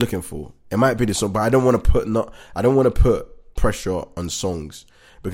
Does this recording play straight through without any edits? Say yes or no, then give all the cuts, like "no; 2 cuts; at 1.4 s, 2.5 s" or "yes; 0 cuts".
no; 1 cut; at 3.5 s